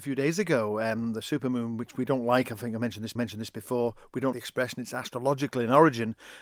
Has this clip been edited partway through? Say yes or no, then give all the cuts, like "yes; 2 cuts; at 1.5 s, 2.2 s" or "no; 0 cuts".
yes; 2 cuts; at 3.2 s, 4.3 s